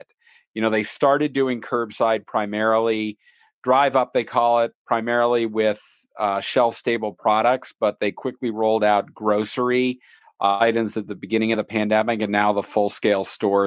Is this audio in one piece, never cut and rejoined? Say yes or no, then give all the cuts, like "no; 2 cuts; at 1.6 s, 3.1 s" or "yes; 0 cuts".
yes; 0 cuts